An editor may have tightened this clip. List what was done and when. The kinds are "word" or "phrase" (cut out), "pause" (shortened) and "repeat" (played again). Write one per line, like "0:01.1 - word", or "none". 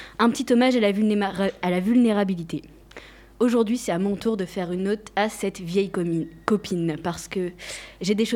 none